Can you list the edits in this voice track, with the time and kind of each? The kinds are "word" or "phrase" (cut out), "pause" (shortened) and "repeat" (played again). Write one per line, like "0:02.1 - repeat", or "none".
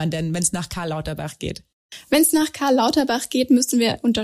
none